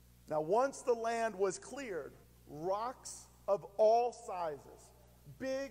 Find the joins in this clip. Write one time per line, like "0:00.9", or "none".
0:02.2